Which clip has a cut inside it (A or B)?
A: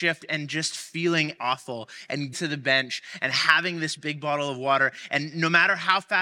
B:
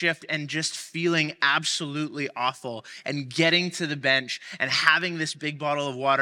A